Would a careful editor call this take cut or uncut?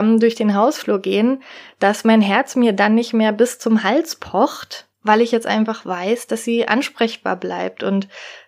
cut